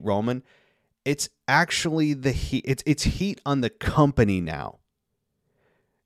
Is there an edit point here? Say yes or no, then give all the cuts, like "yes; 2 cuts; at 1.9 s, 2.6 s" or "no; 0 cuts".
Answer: no; 0 cuts